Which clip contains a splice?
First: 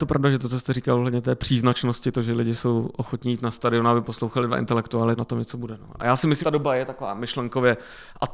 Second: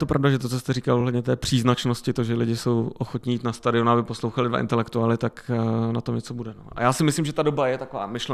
first; 2 cuts; at 5.2 s, 6.4 s

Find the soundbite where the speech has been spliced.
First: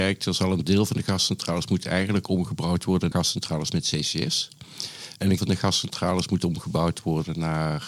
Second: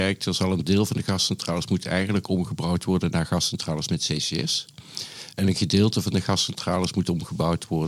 first; 2 cuts; at 3.1 s, 5.4 s

